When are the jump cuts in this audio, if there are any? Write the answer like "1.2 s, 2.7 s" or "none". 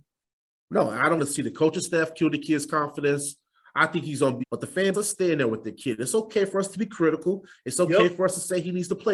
1.2 s, 4.4 s, 4.9 s